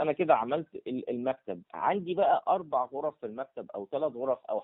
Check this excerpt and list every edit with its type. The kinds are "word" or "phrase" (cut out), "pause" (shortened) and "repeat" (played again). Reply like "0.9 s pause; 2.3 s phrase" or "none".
1.7 s pause